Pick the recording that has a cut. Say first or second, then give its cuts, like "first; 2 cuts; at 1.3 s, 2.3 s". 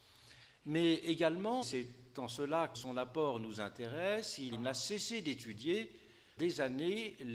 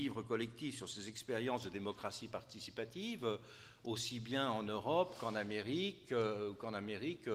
first; 4 cuts; at 1.6 s, 2.7 s, 4.5 s, 6.4 s